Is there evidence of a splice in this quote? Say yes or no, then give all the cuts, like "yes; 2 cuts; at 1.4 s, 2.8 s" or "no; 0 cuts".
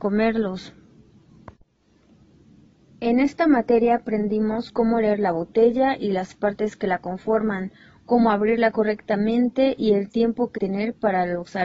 yes; 1 cut; at 10.6 s